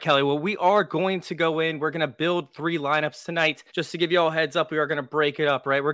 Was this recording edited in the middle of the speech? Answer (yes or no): yes